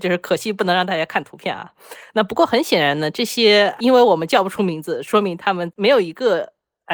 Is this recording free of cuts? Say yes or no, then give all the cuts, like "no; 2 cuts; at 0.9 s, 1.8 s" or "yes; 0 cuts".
no; 1 cut; at 3.8 s